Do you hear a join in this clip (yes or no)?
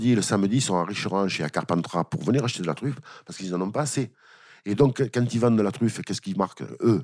no